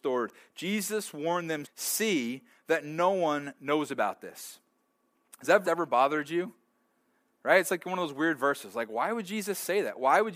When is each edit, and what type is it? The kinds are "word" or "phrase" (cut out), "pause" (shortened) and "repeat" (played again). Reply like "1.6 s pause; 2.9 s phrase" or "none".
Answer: 1.6 s word; 5.6 s word